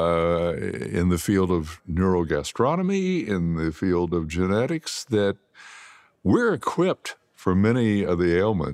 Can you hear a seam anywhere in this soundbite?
no; 0 cuts

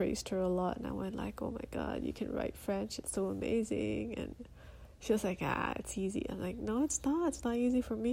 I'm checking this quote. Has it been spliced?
no; 0 cuts

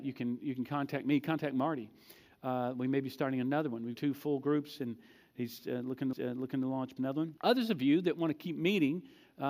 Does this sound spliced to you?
yes; 4 cuts; at 3.9 s, 6.1 s, 7.0 s, 7.4 s

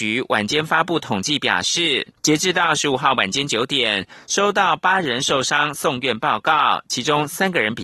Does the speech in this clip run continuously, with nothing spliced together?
no; 1 cut; at 2.2 s

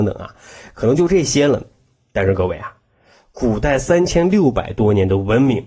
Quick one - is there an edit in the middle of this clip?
no; 0 cuts

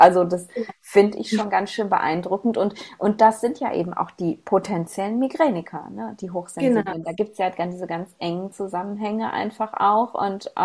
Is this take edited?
no; 0 cuts

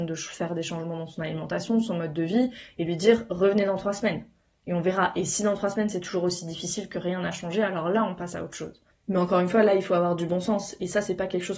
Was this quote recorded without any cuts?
no; 1 cut; at 8.9 s

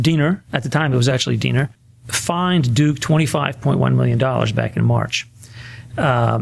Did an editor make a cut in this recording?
no; 0 cuts

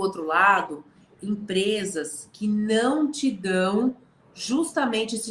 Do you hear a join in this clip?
no; 0 cuts

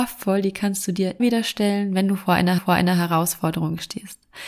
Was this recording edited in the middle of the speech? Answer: yes; 2 cuts; at 1.2 s, 2.6 s

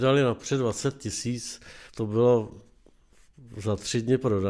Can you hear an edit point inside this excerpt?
yes; 1 cut; at 1.9 s

